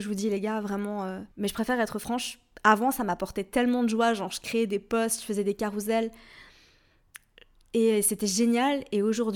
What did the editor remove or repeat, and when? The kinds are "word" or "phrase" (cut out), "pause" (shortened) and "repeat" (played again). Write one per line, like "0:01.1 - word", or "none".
0:01.3 - pause